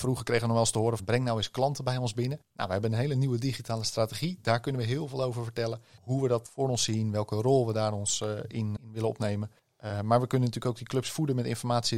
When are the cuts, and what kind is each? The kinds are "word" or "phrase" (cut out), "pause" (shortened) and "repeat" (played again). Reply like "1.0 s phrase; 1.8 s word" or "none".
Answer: 1.0 s word; 2.4 s pause; 8.8 s word